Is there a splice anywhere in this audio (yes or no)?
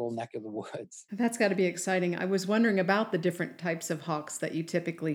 yes